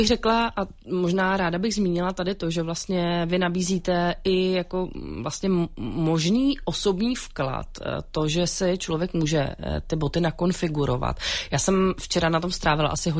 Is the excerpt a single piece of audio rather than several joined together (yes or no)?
yes